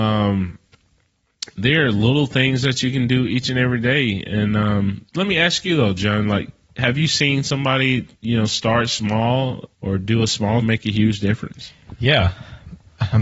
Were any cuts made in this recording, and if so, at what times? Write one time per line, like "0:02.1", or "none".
0:05.1
0:08.1
0:09.7
0:10.6